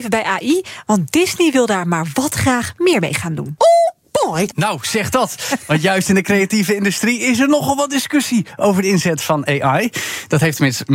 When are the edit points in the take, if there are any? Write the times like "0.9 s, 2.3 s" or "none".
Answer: none